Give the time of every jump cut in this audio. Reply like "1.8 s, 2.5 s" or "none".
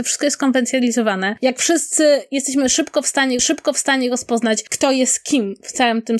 3.4 s

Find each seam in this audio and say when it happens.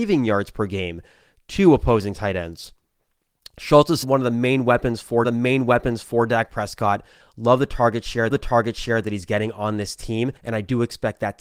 4.0 s, 5.2 s, 8.3 s, 10.4 s

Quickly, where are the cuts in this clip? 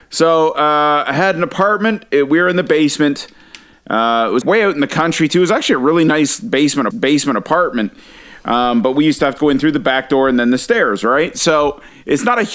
4.4 s, 6.9 s, 9.4 s

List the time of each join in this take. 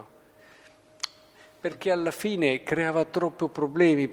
none

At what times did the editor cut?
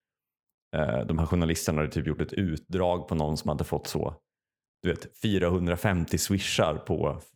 none

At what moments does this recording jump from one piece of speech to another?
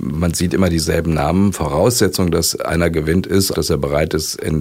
3.5 s

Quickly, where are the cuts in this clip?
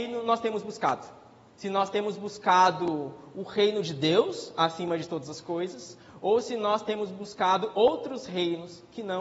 none

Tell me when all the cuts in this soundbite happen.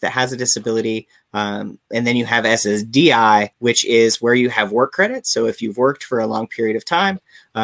3.5 s

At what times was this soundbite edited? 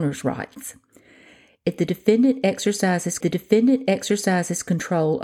3.2 s

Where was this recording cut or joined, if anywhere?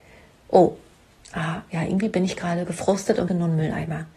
3.3 s

